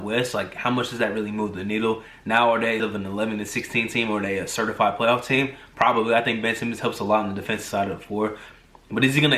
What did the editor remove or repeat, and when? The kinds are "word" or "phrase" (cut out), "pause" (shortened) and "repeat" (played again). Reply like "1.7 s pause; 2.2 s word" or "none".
2.8 s word